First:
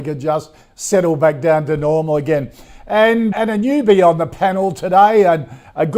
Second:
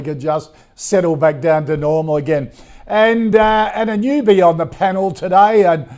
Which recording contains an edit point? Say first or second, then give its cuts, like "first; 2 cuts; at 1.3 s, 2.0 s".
first; 1 cut; at 3.3 s